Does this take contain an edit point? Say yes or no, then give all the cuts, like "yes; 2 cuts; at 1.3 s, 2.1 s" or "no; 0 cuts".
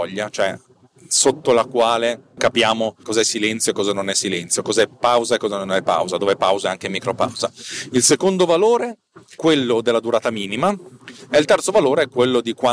no; 0 cuts